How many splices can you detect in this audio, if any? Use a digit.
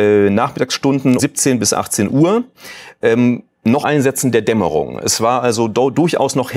2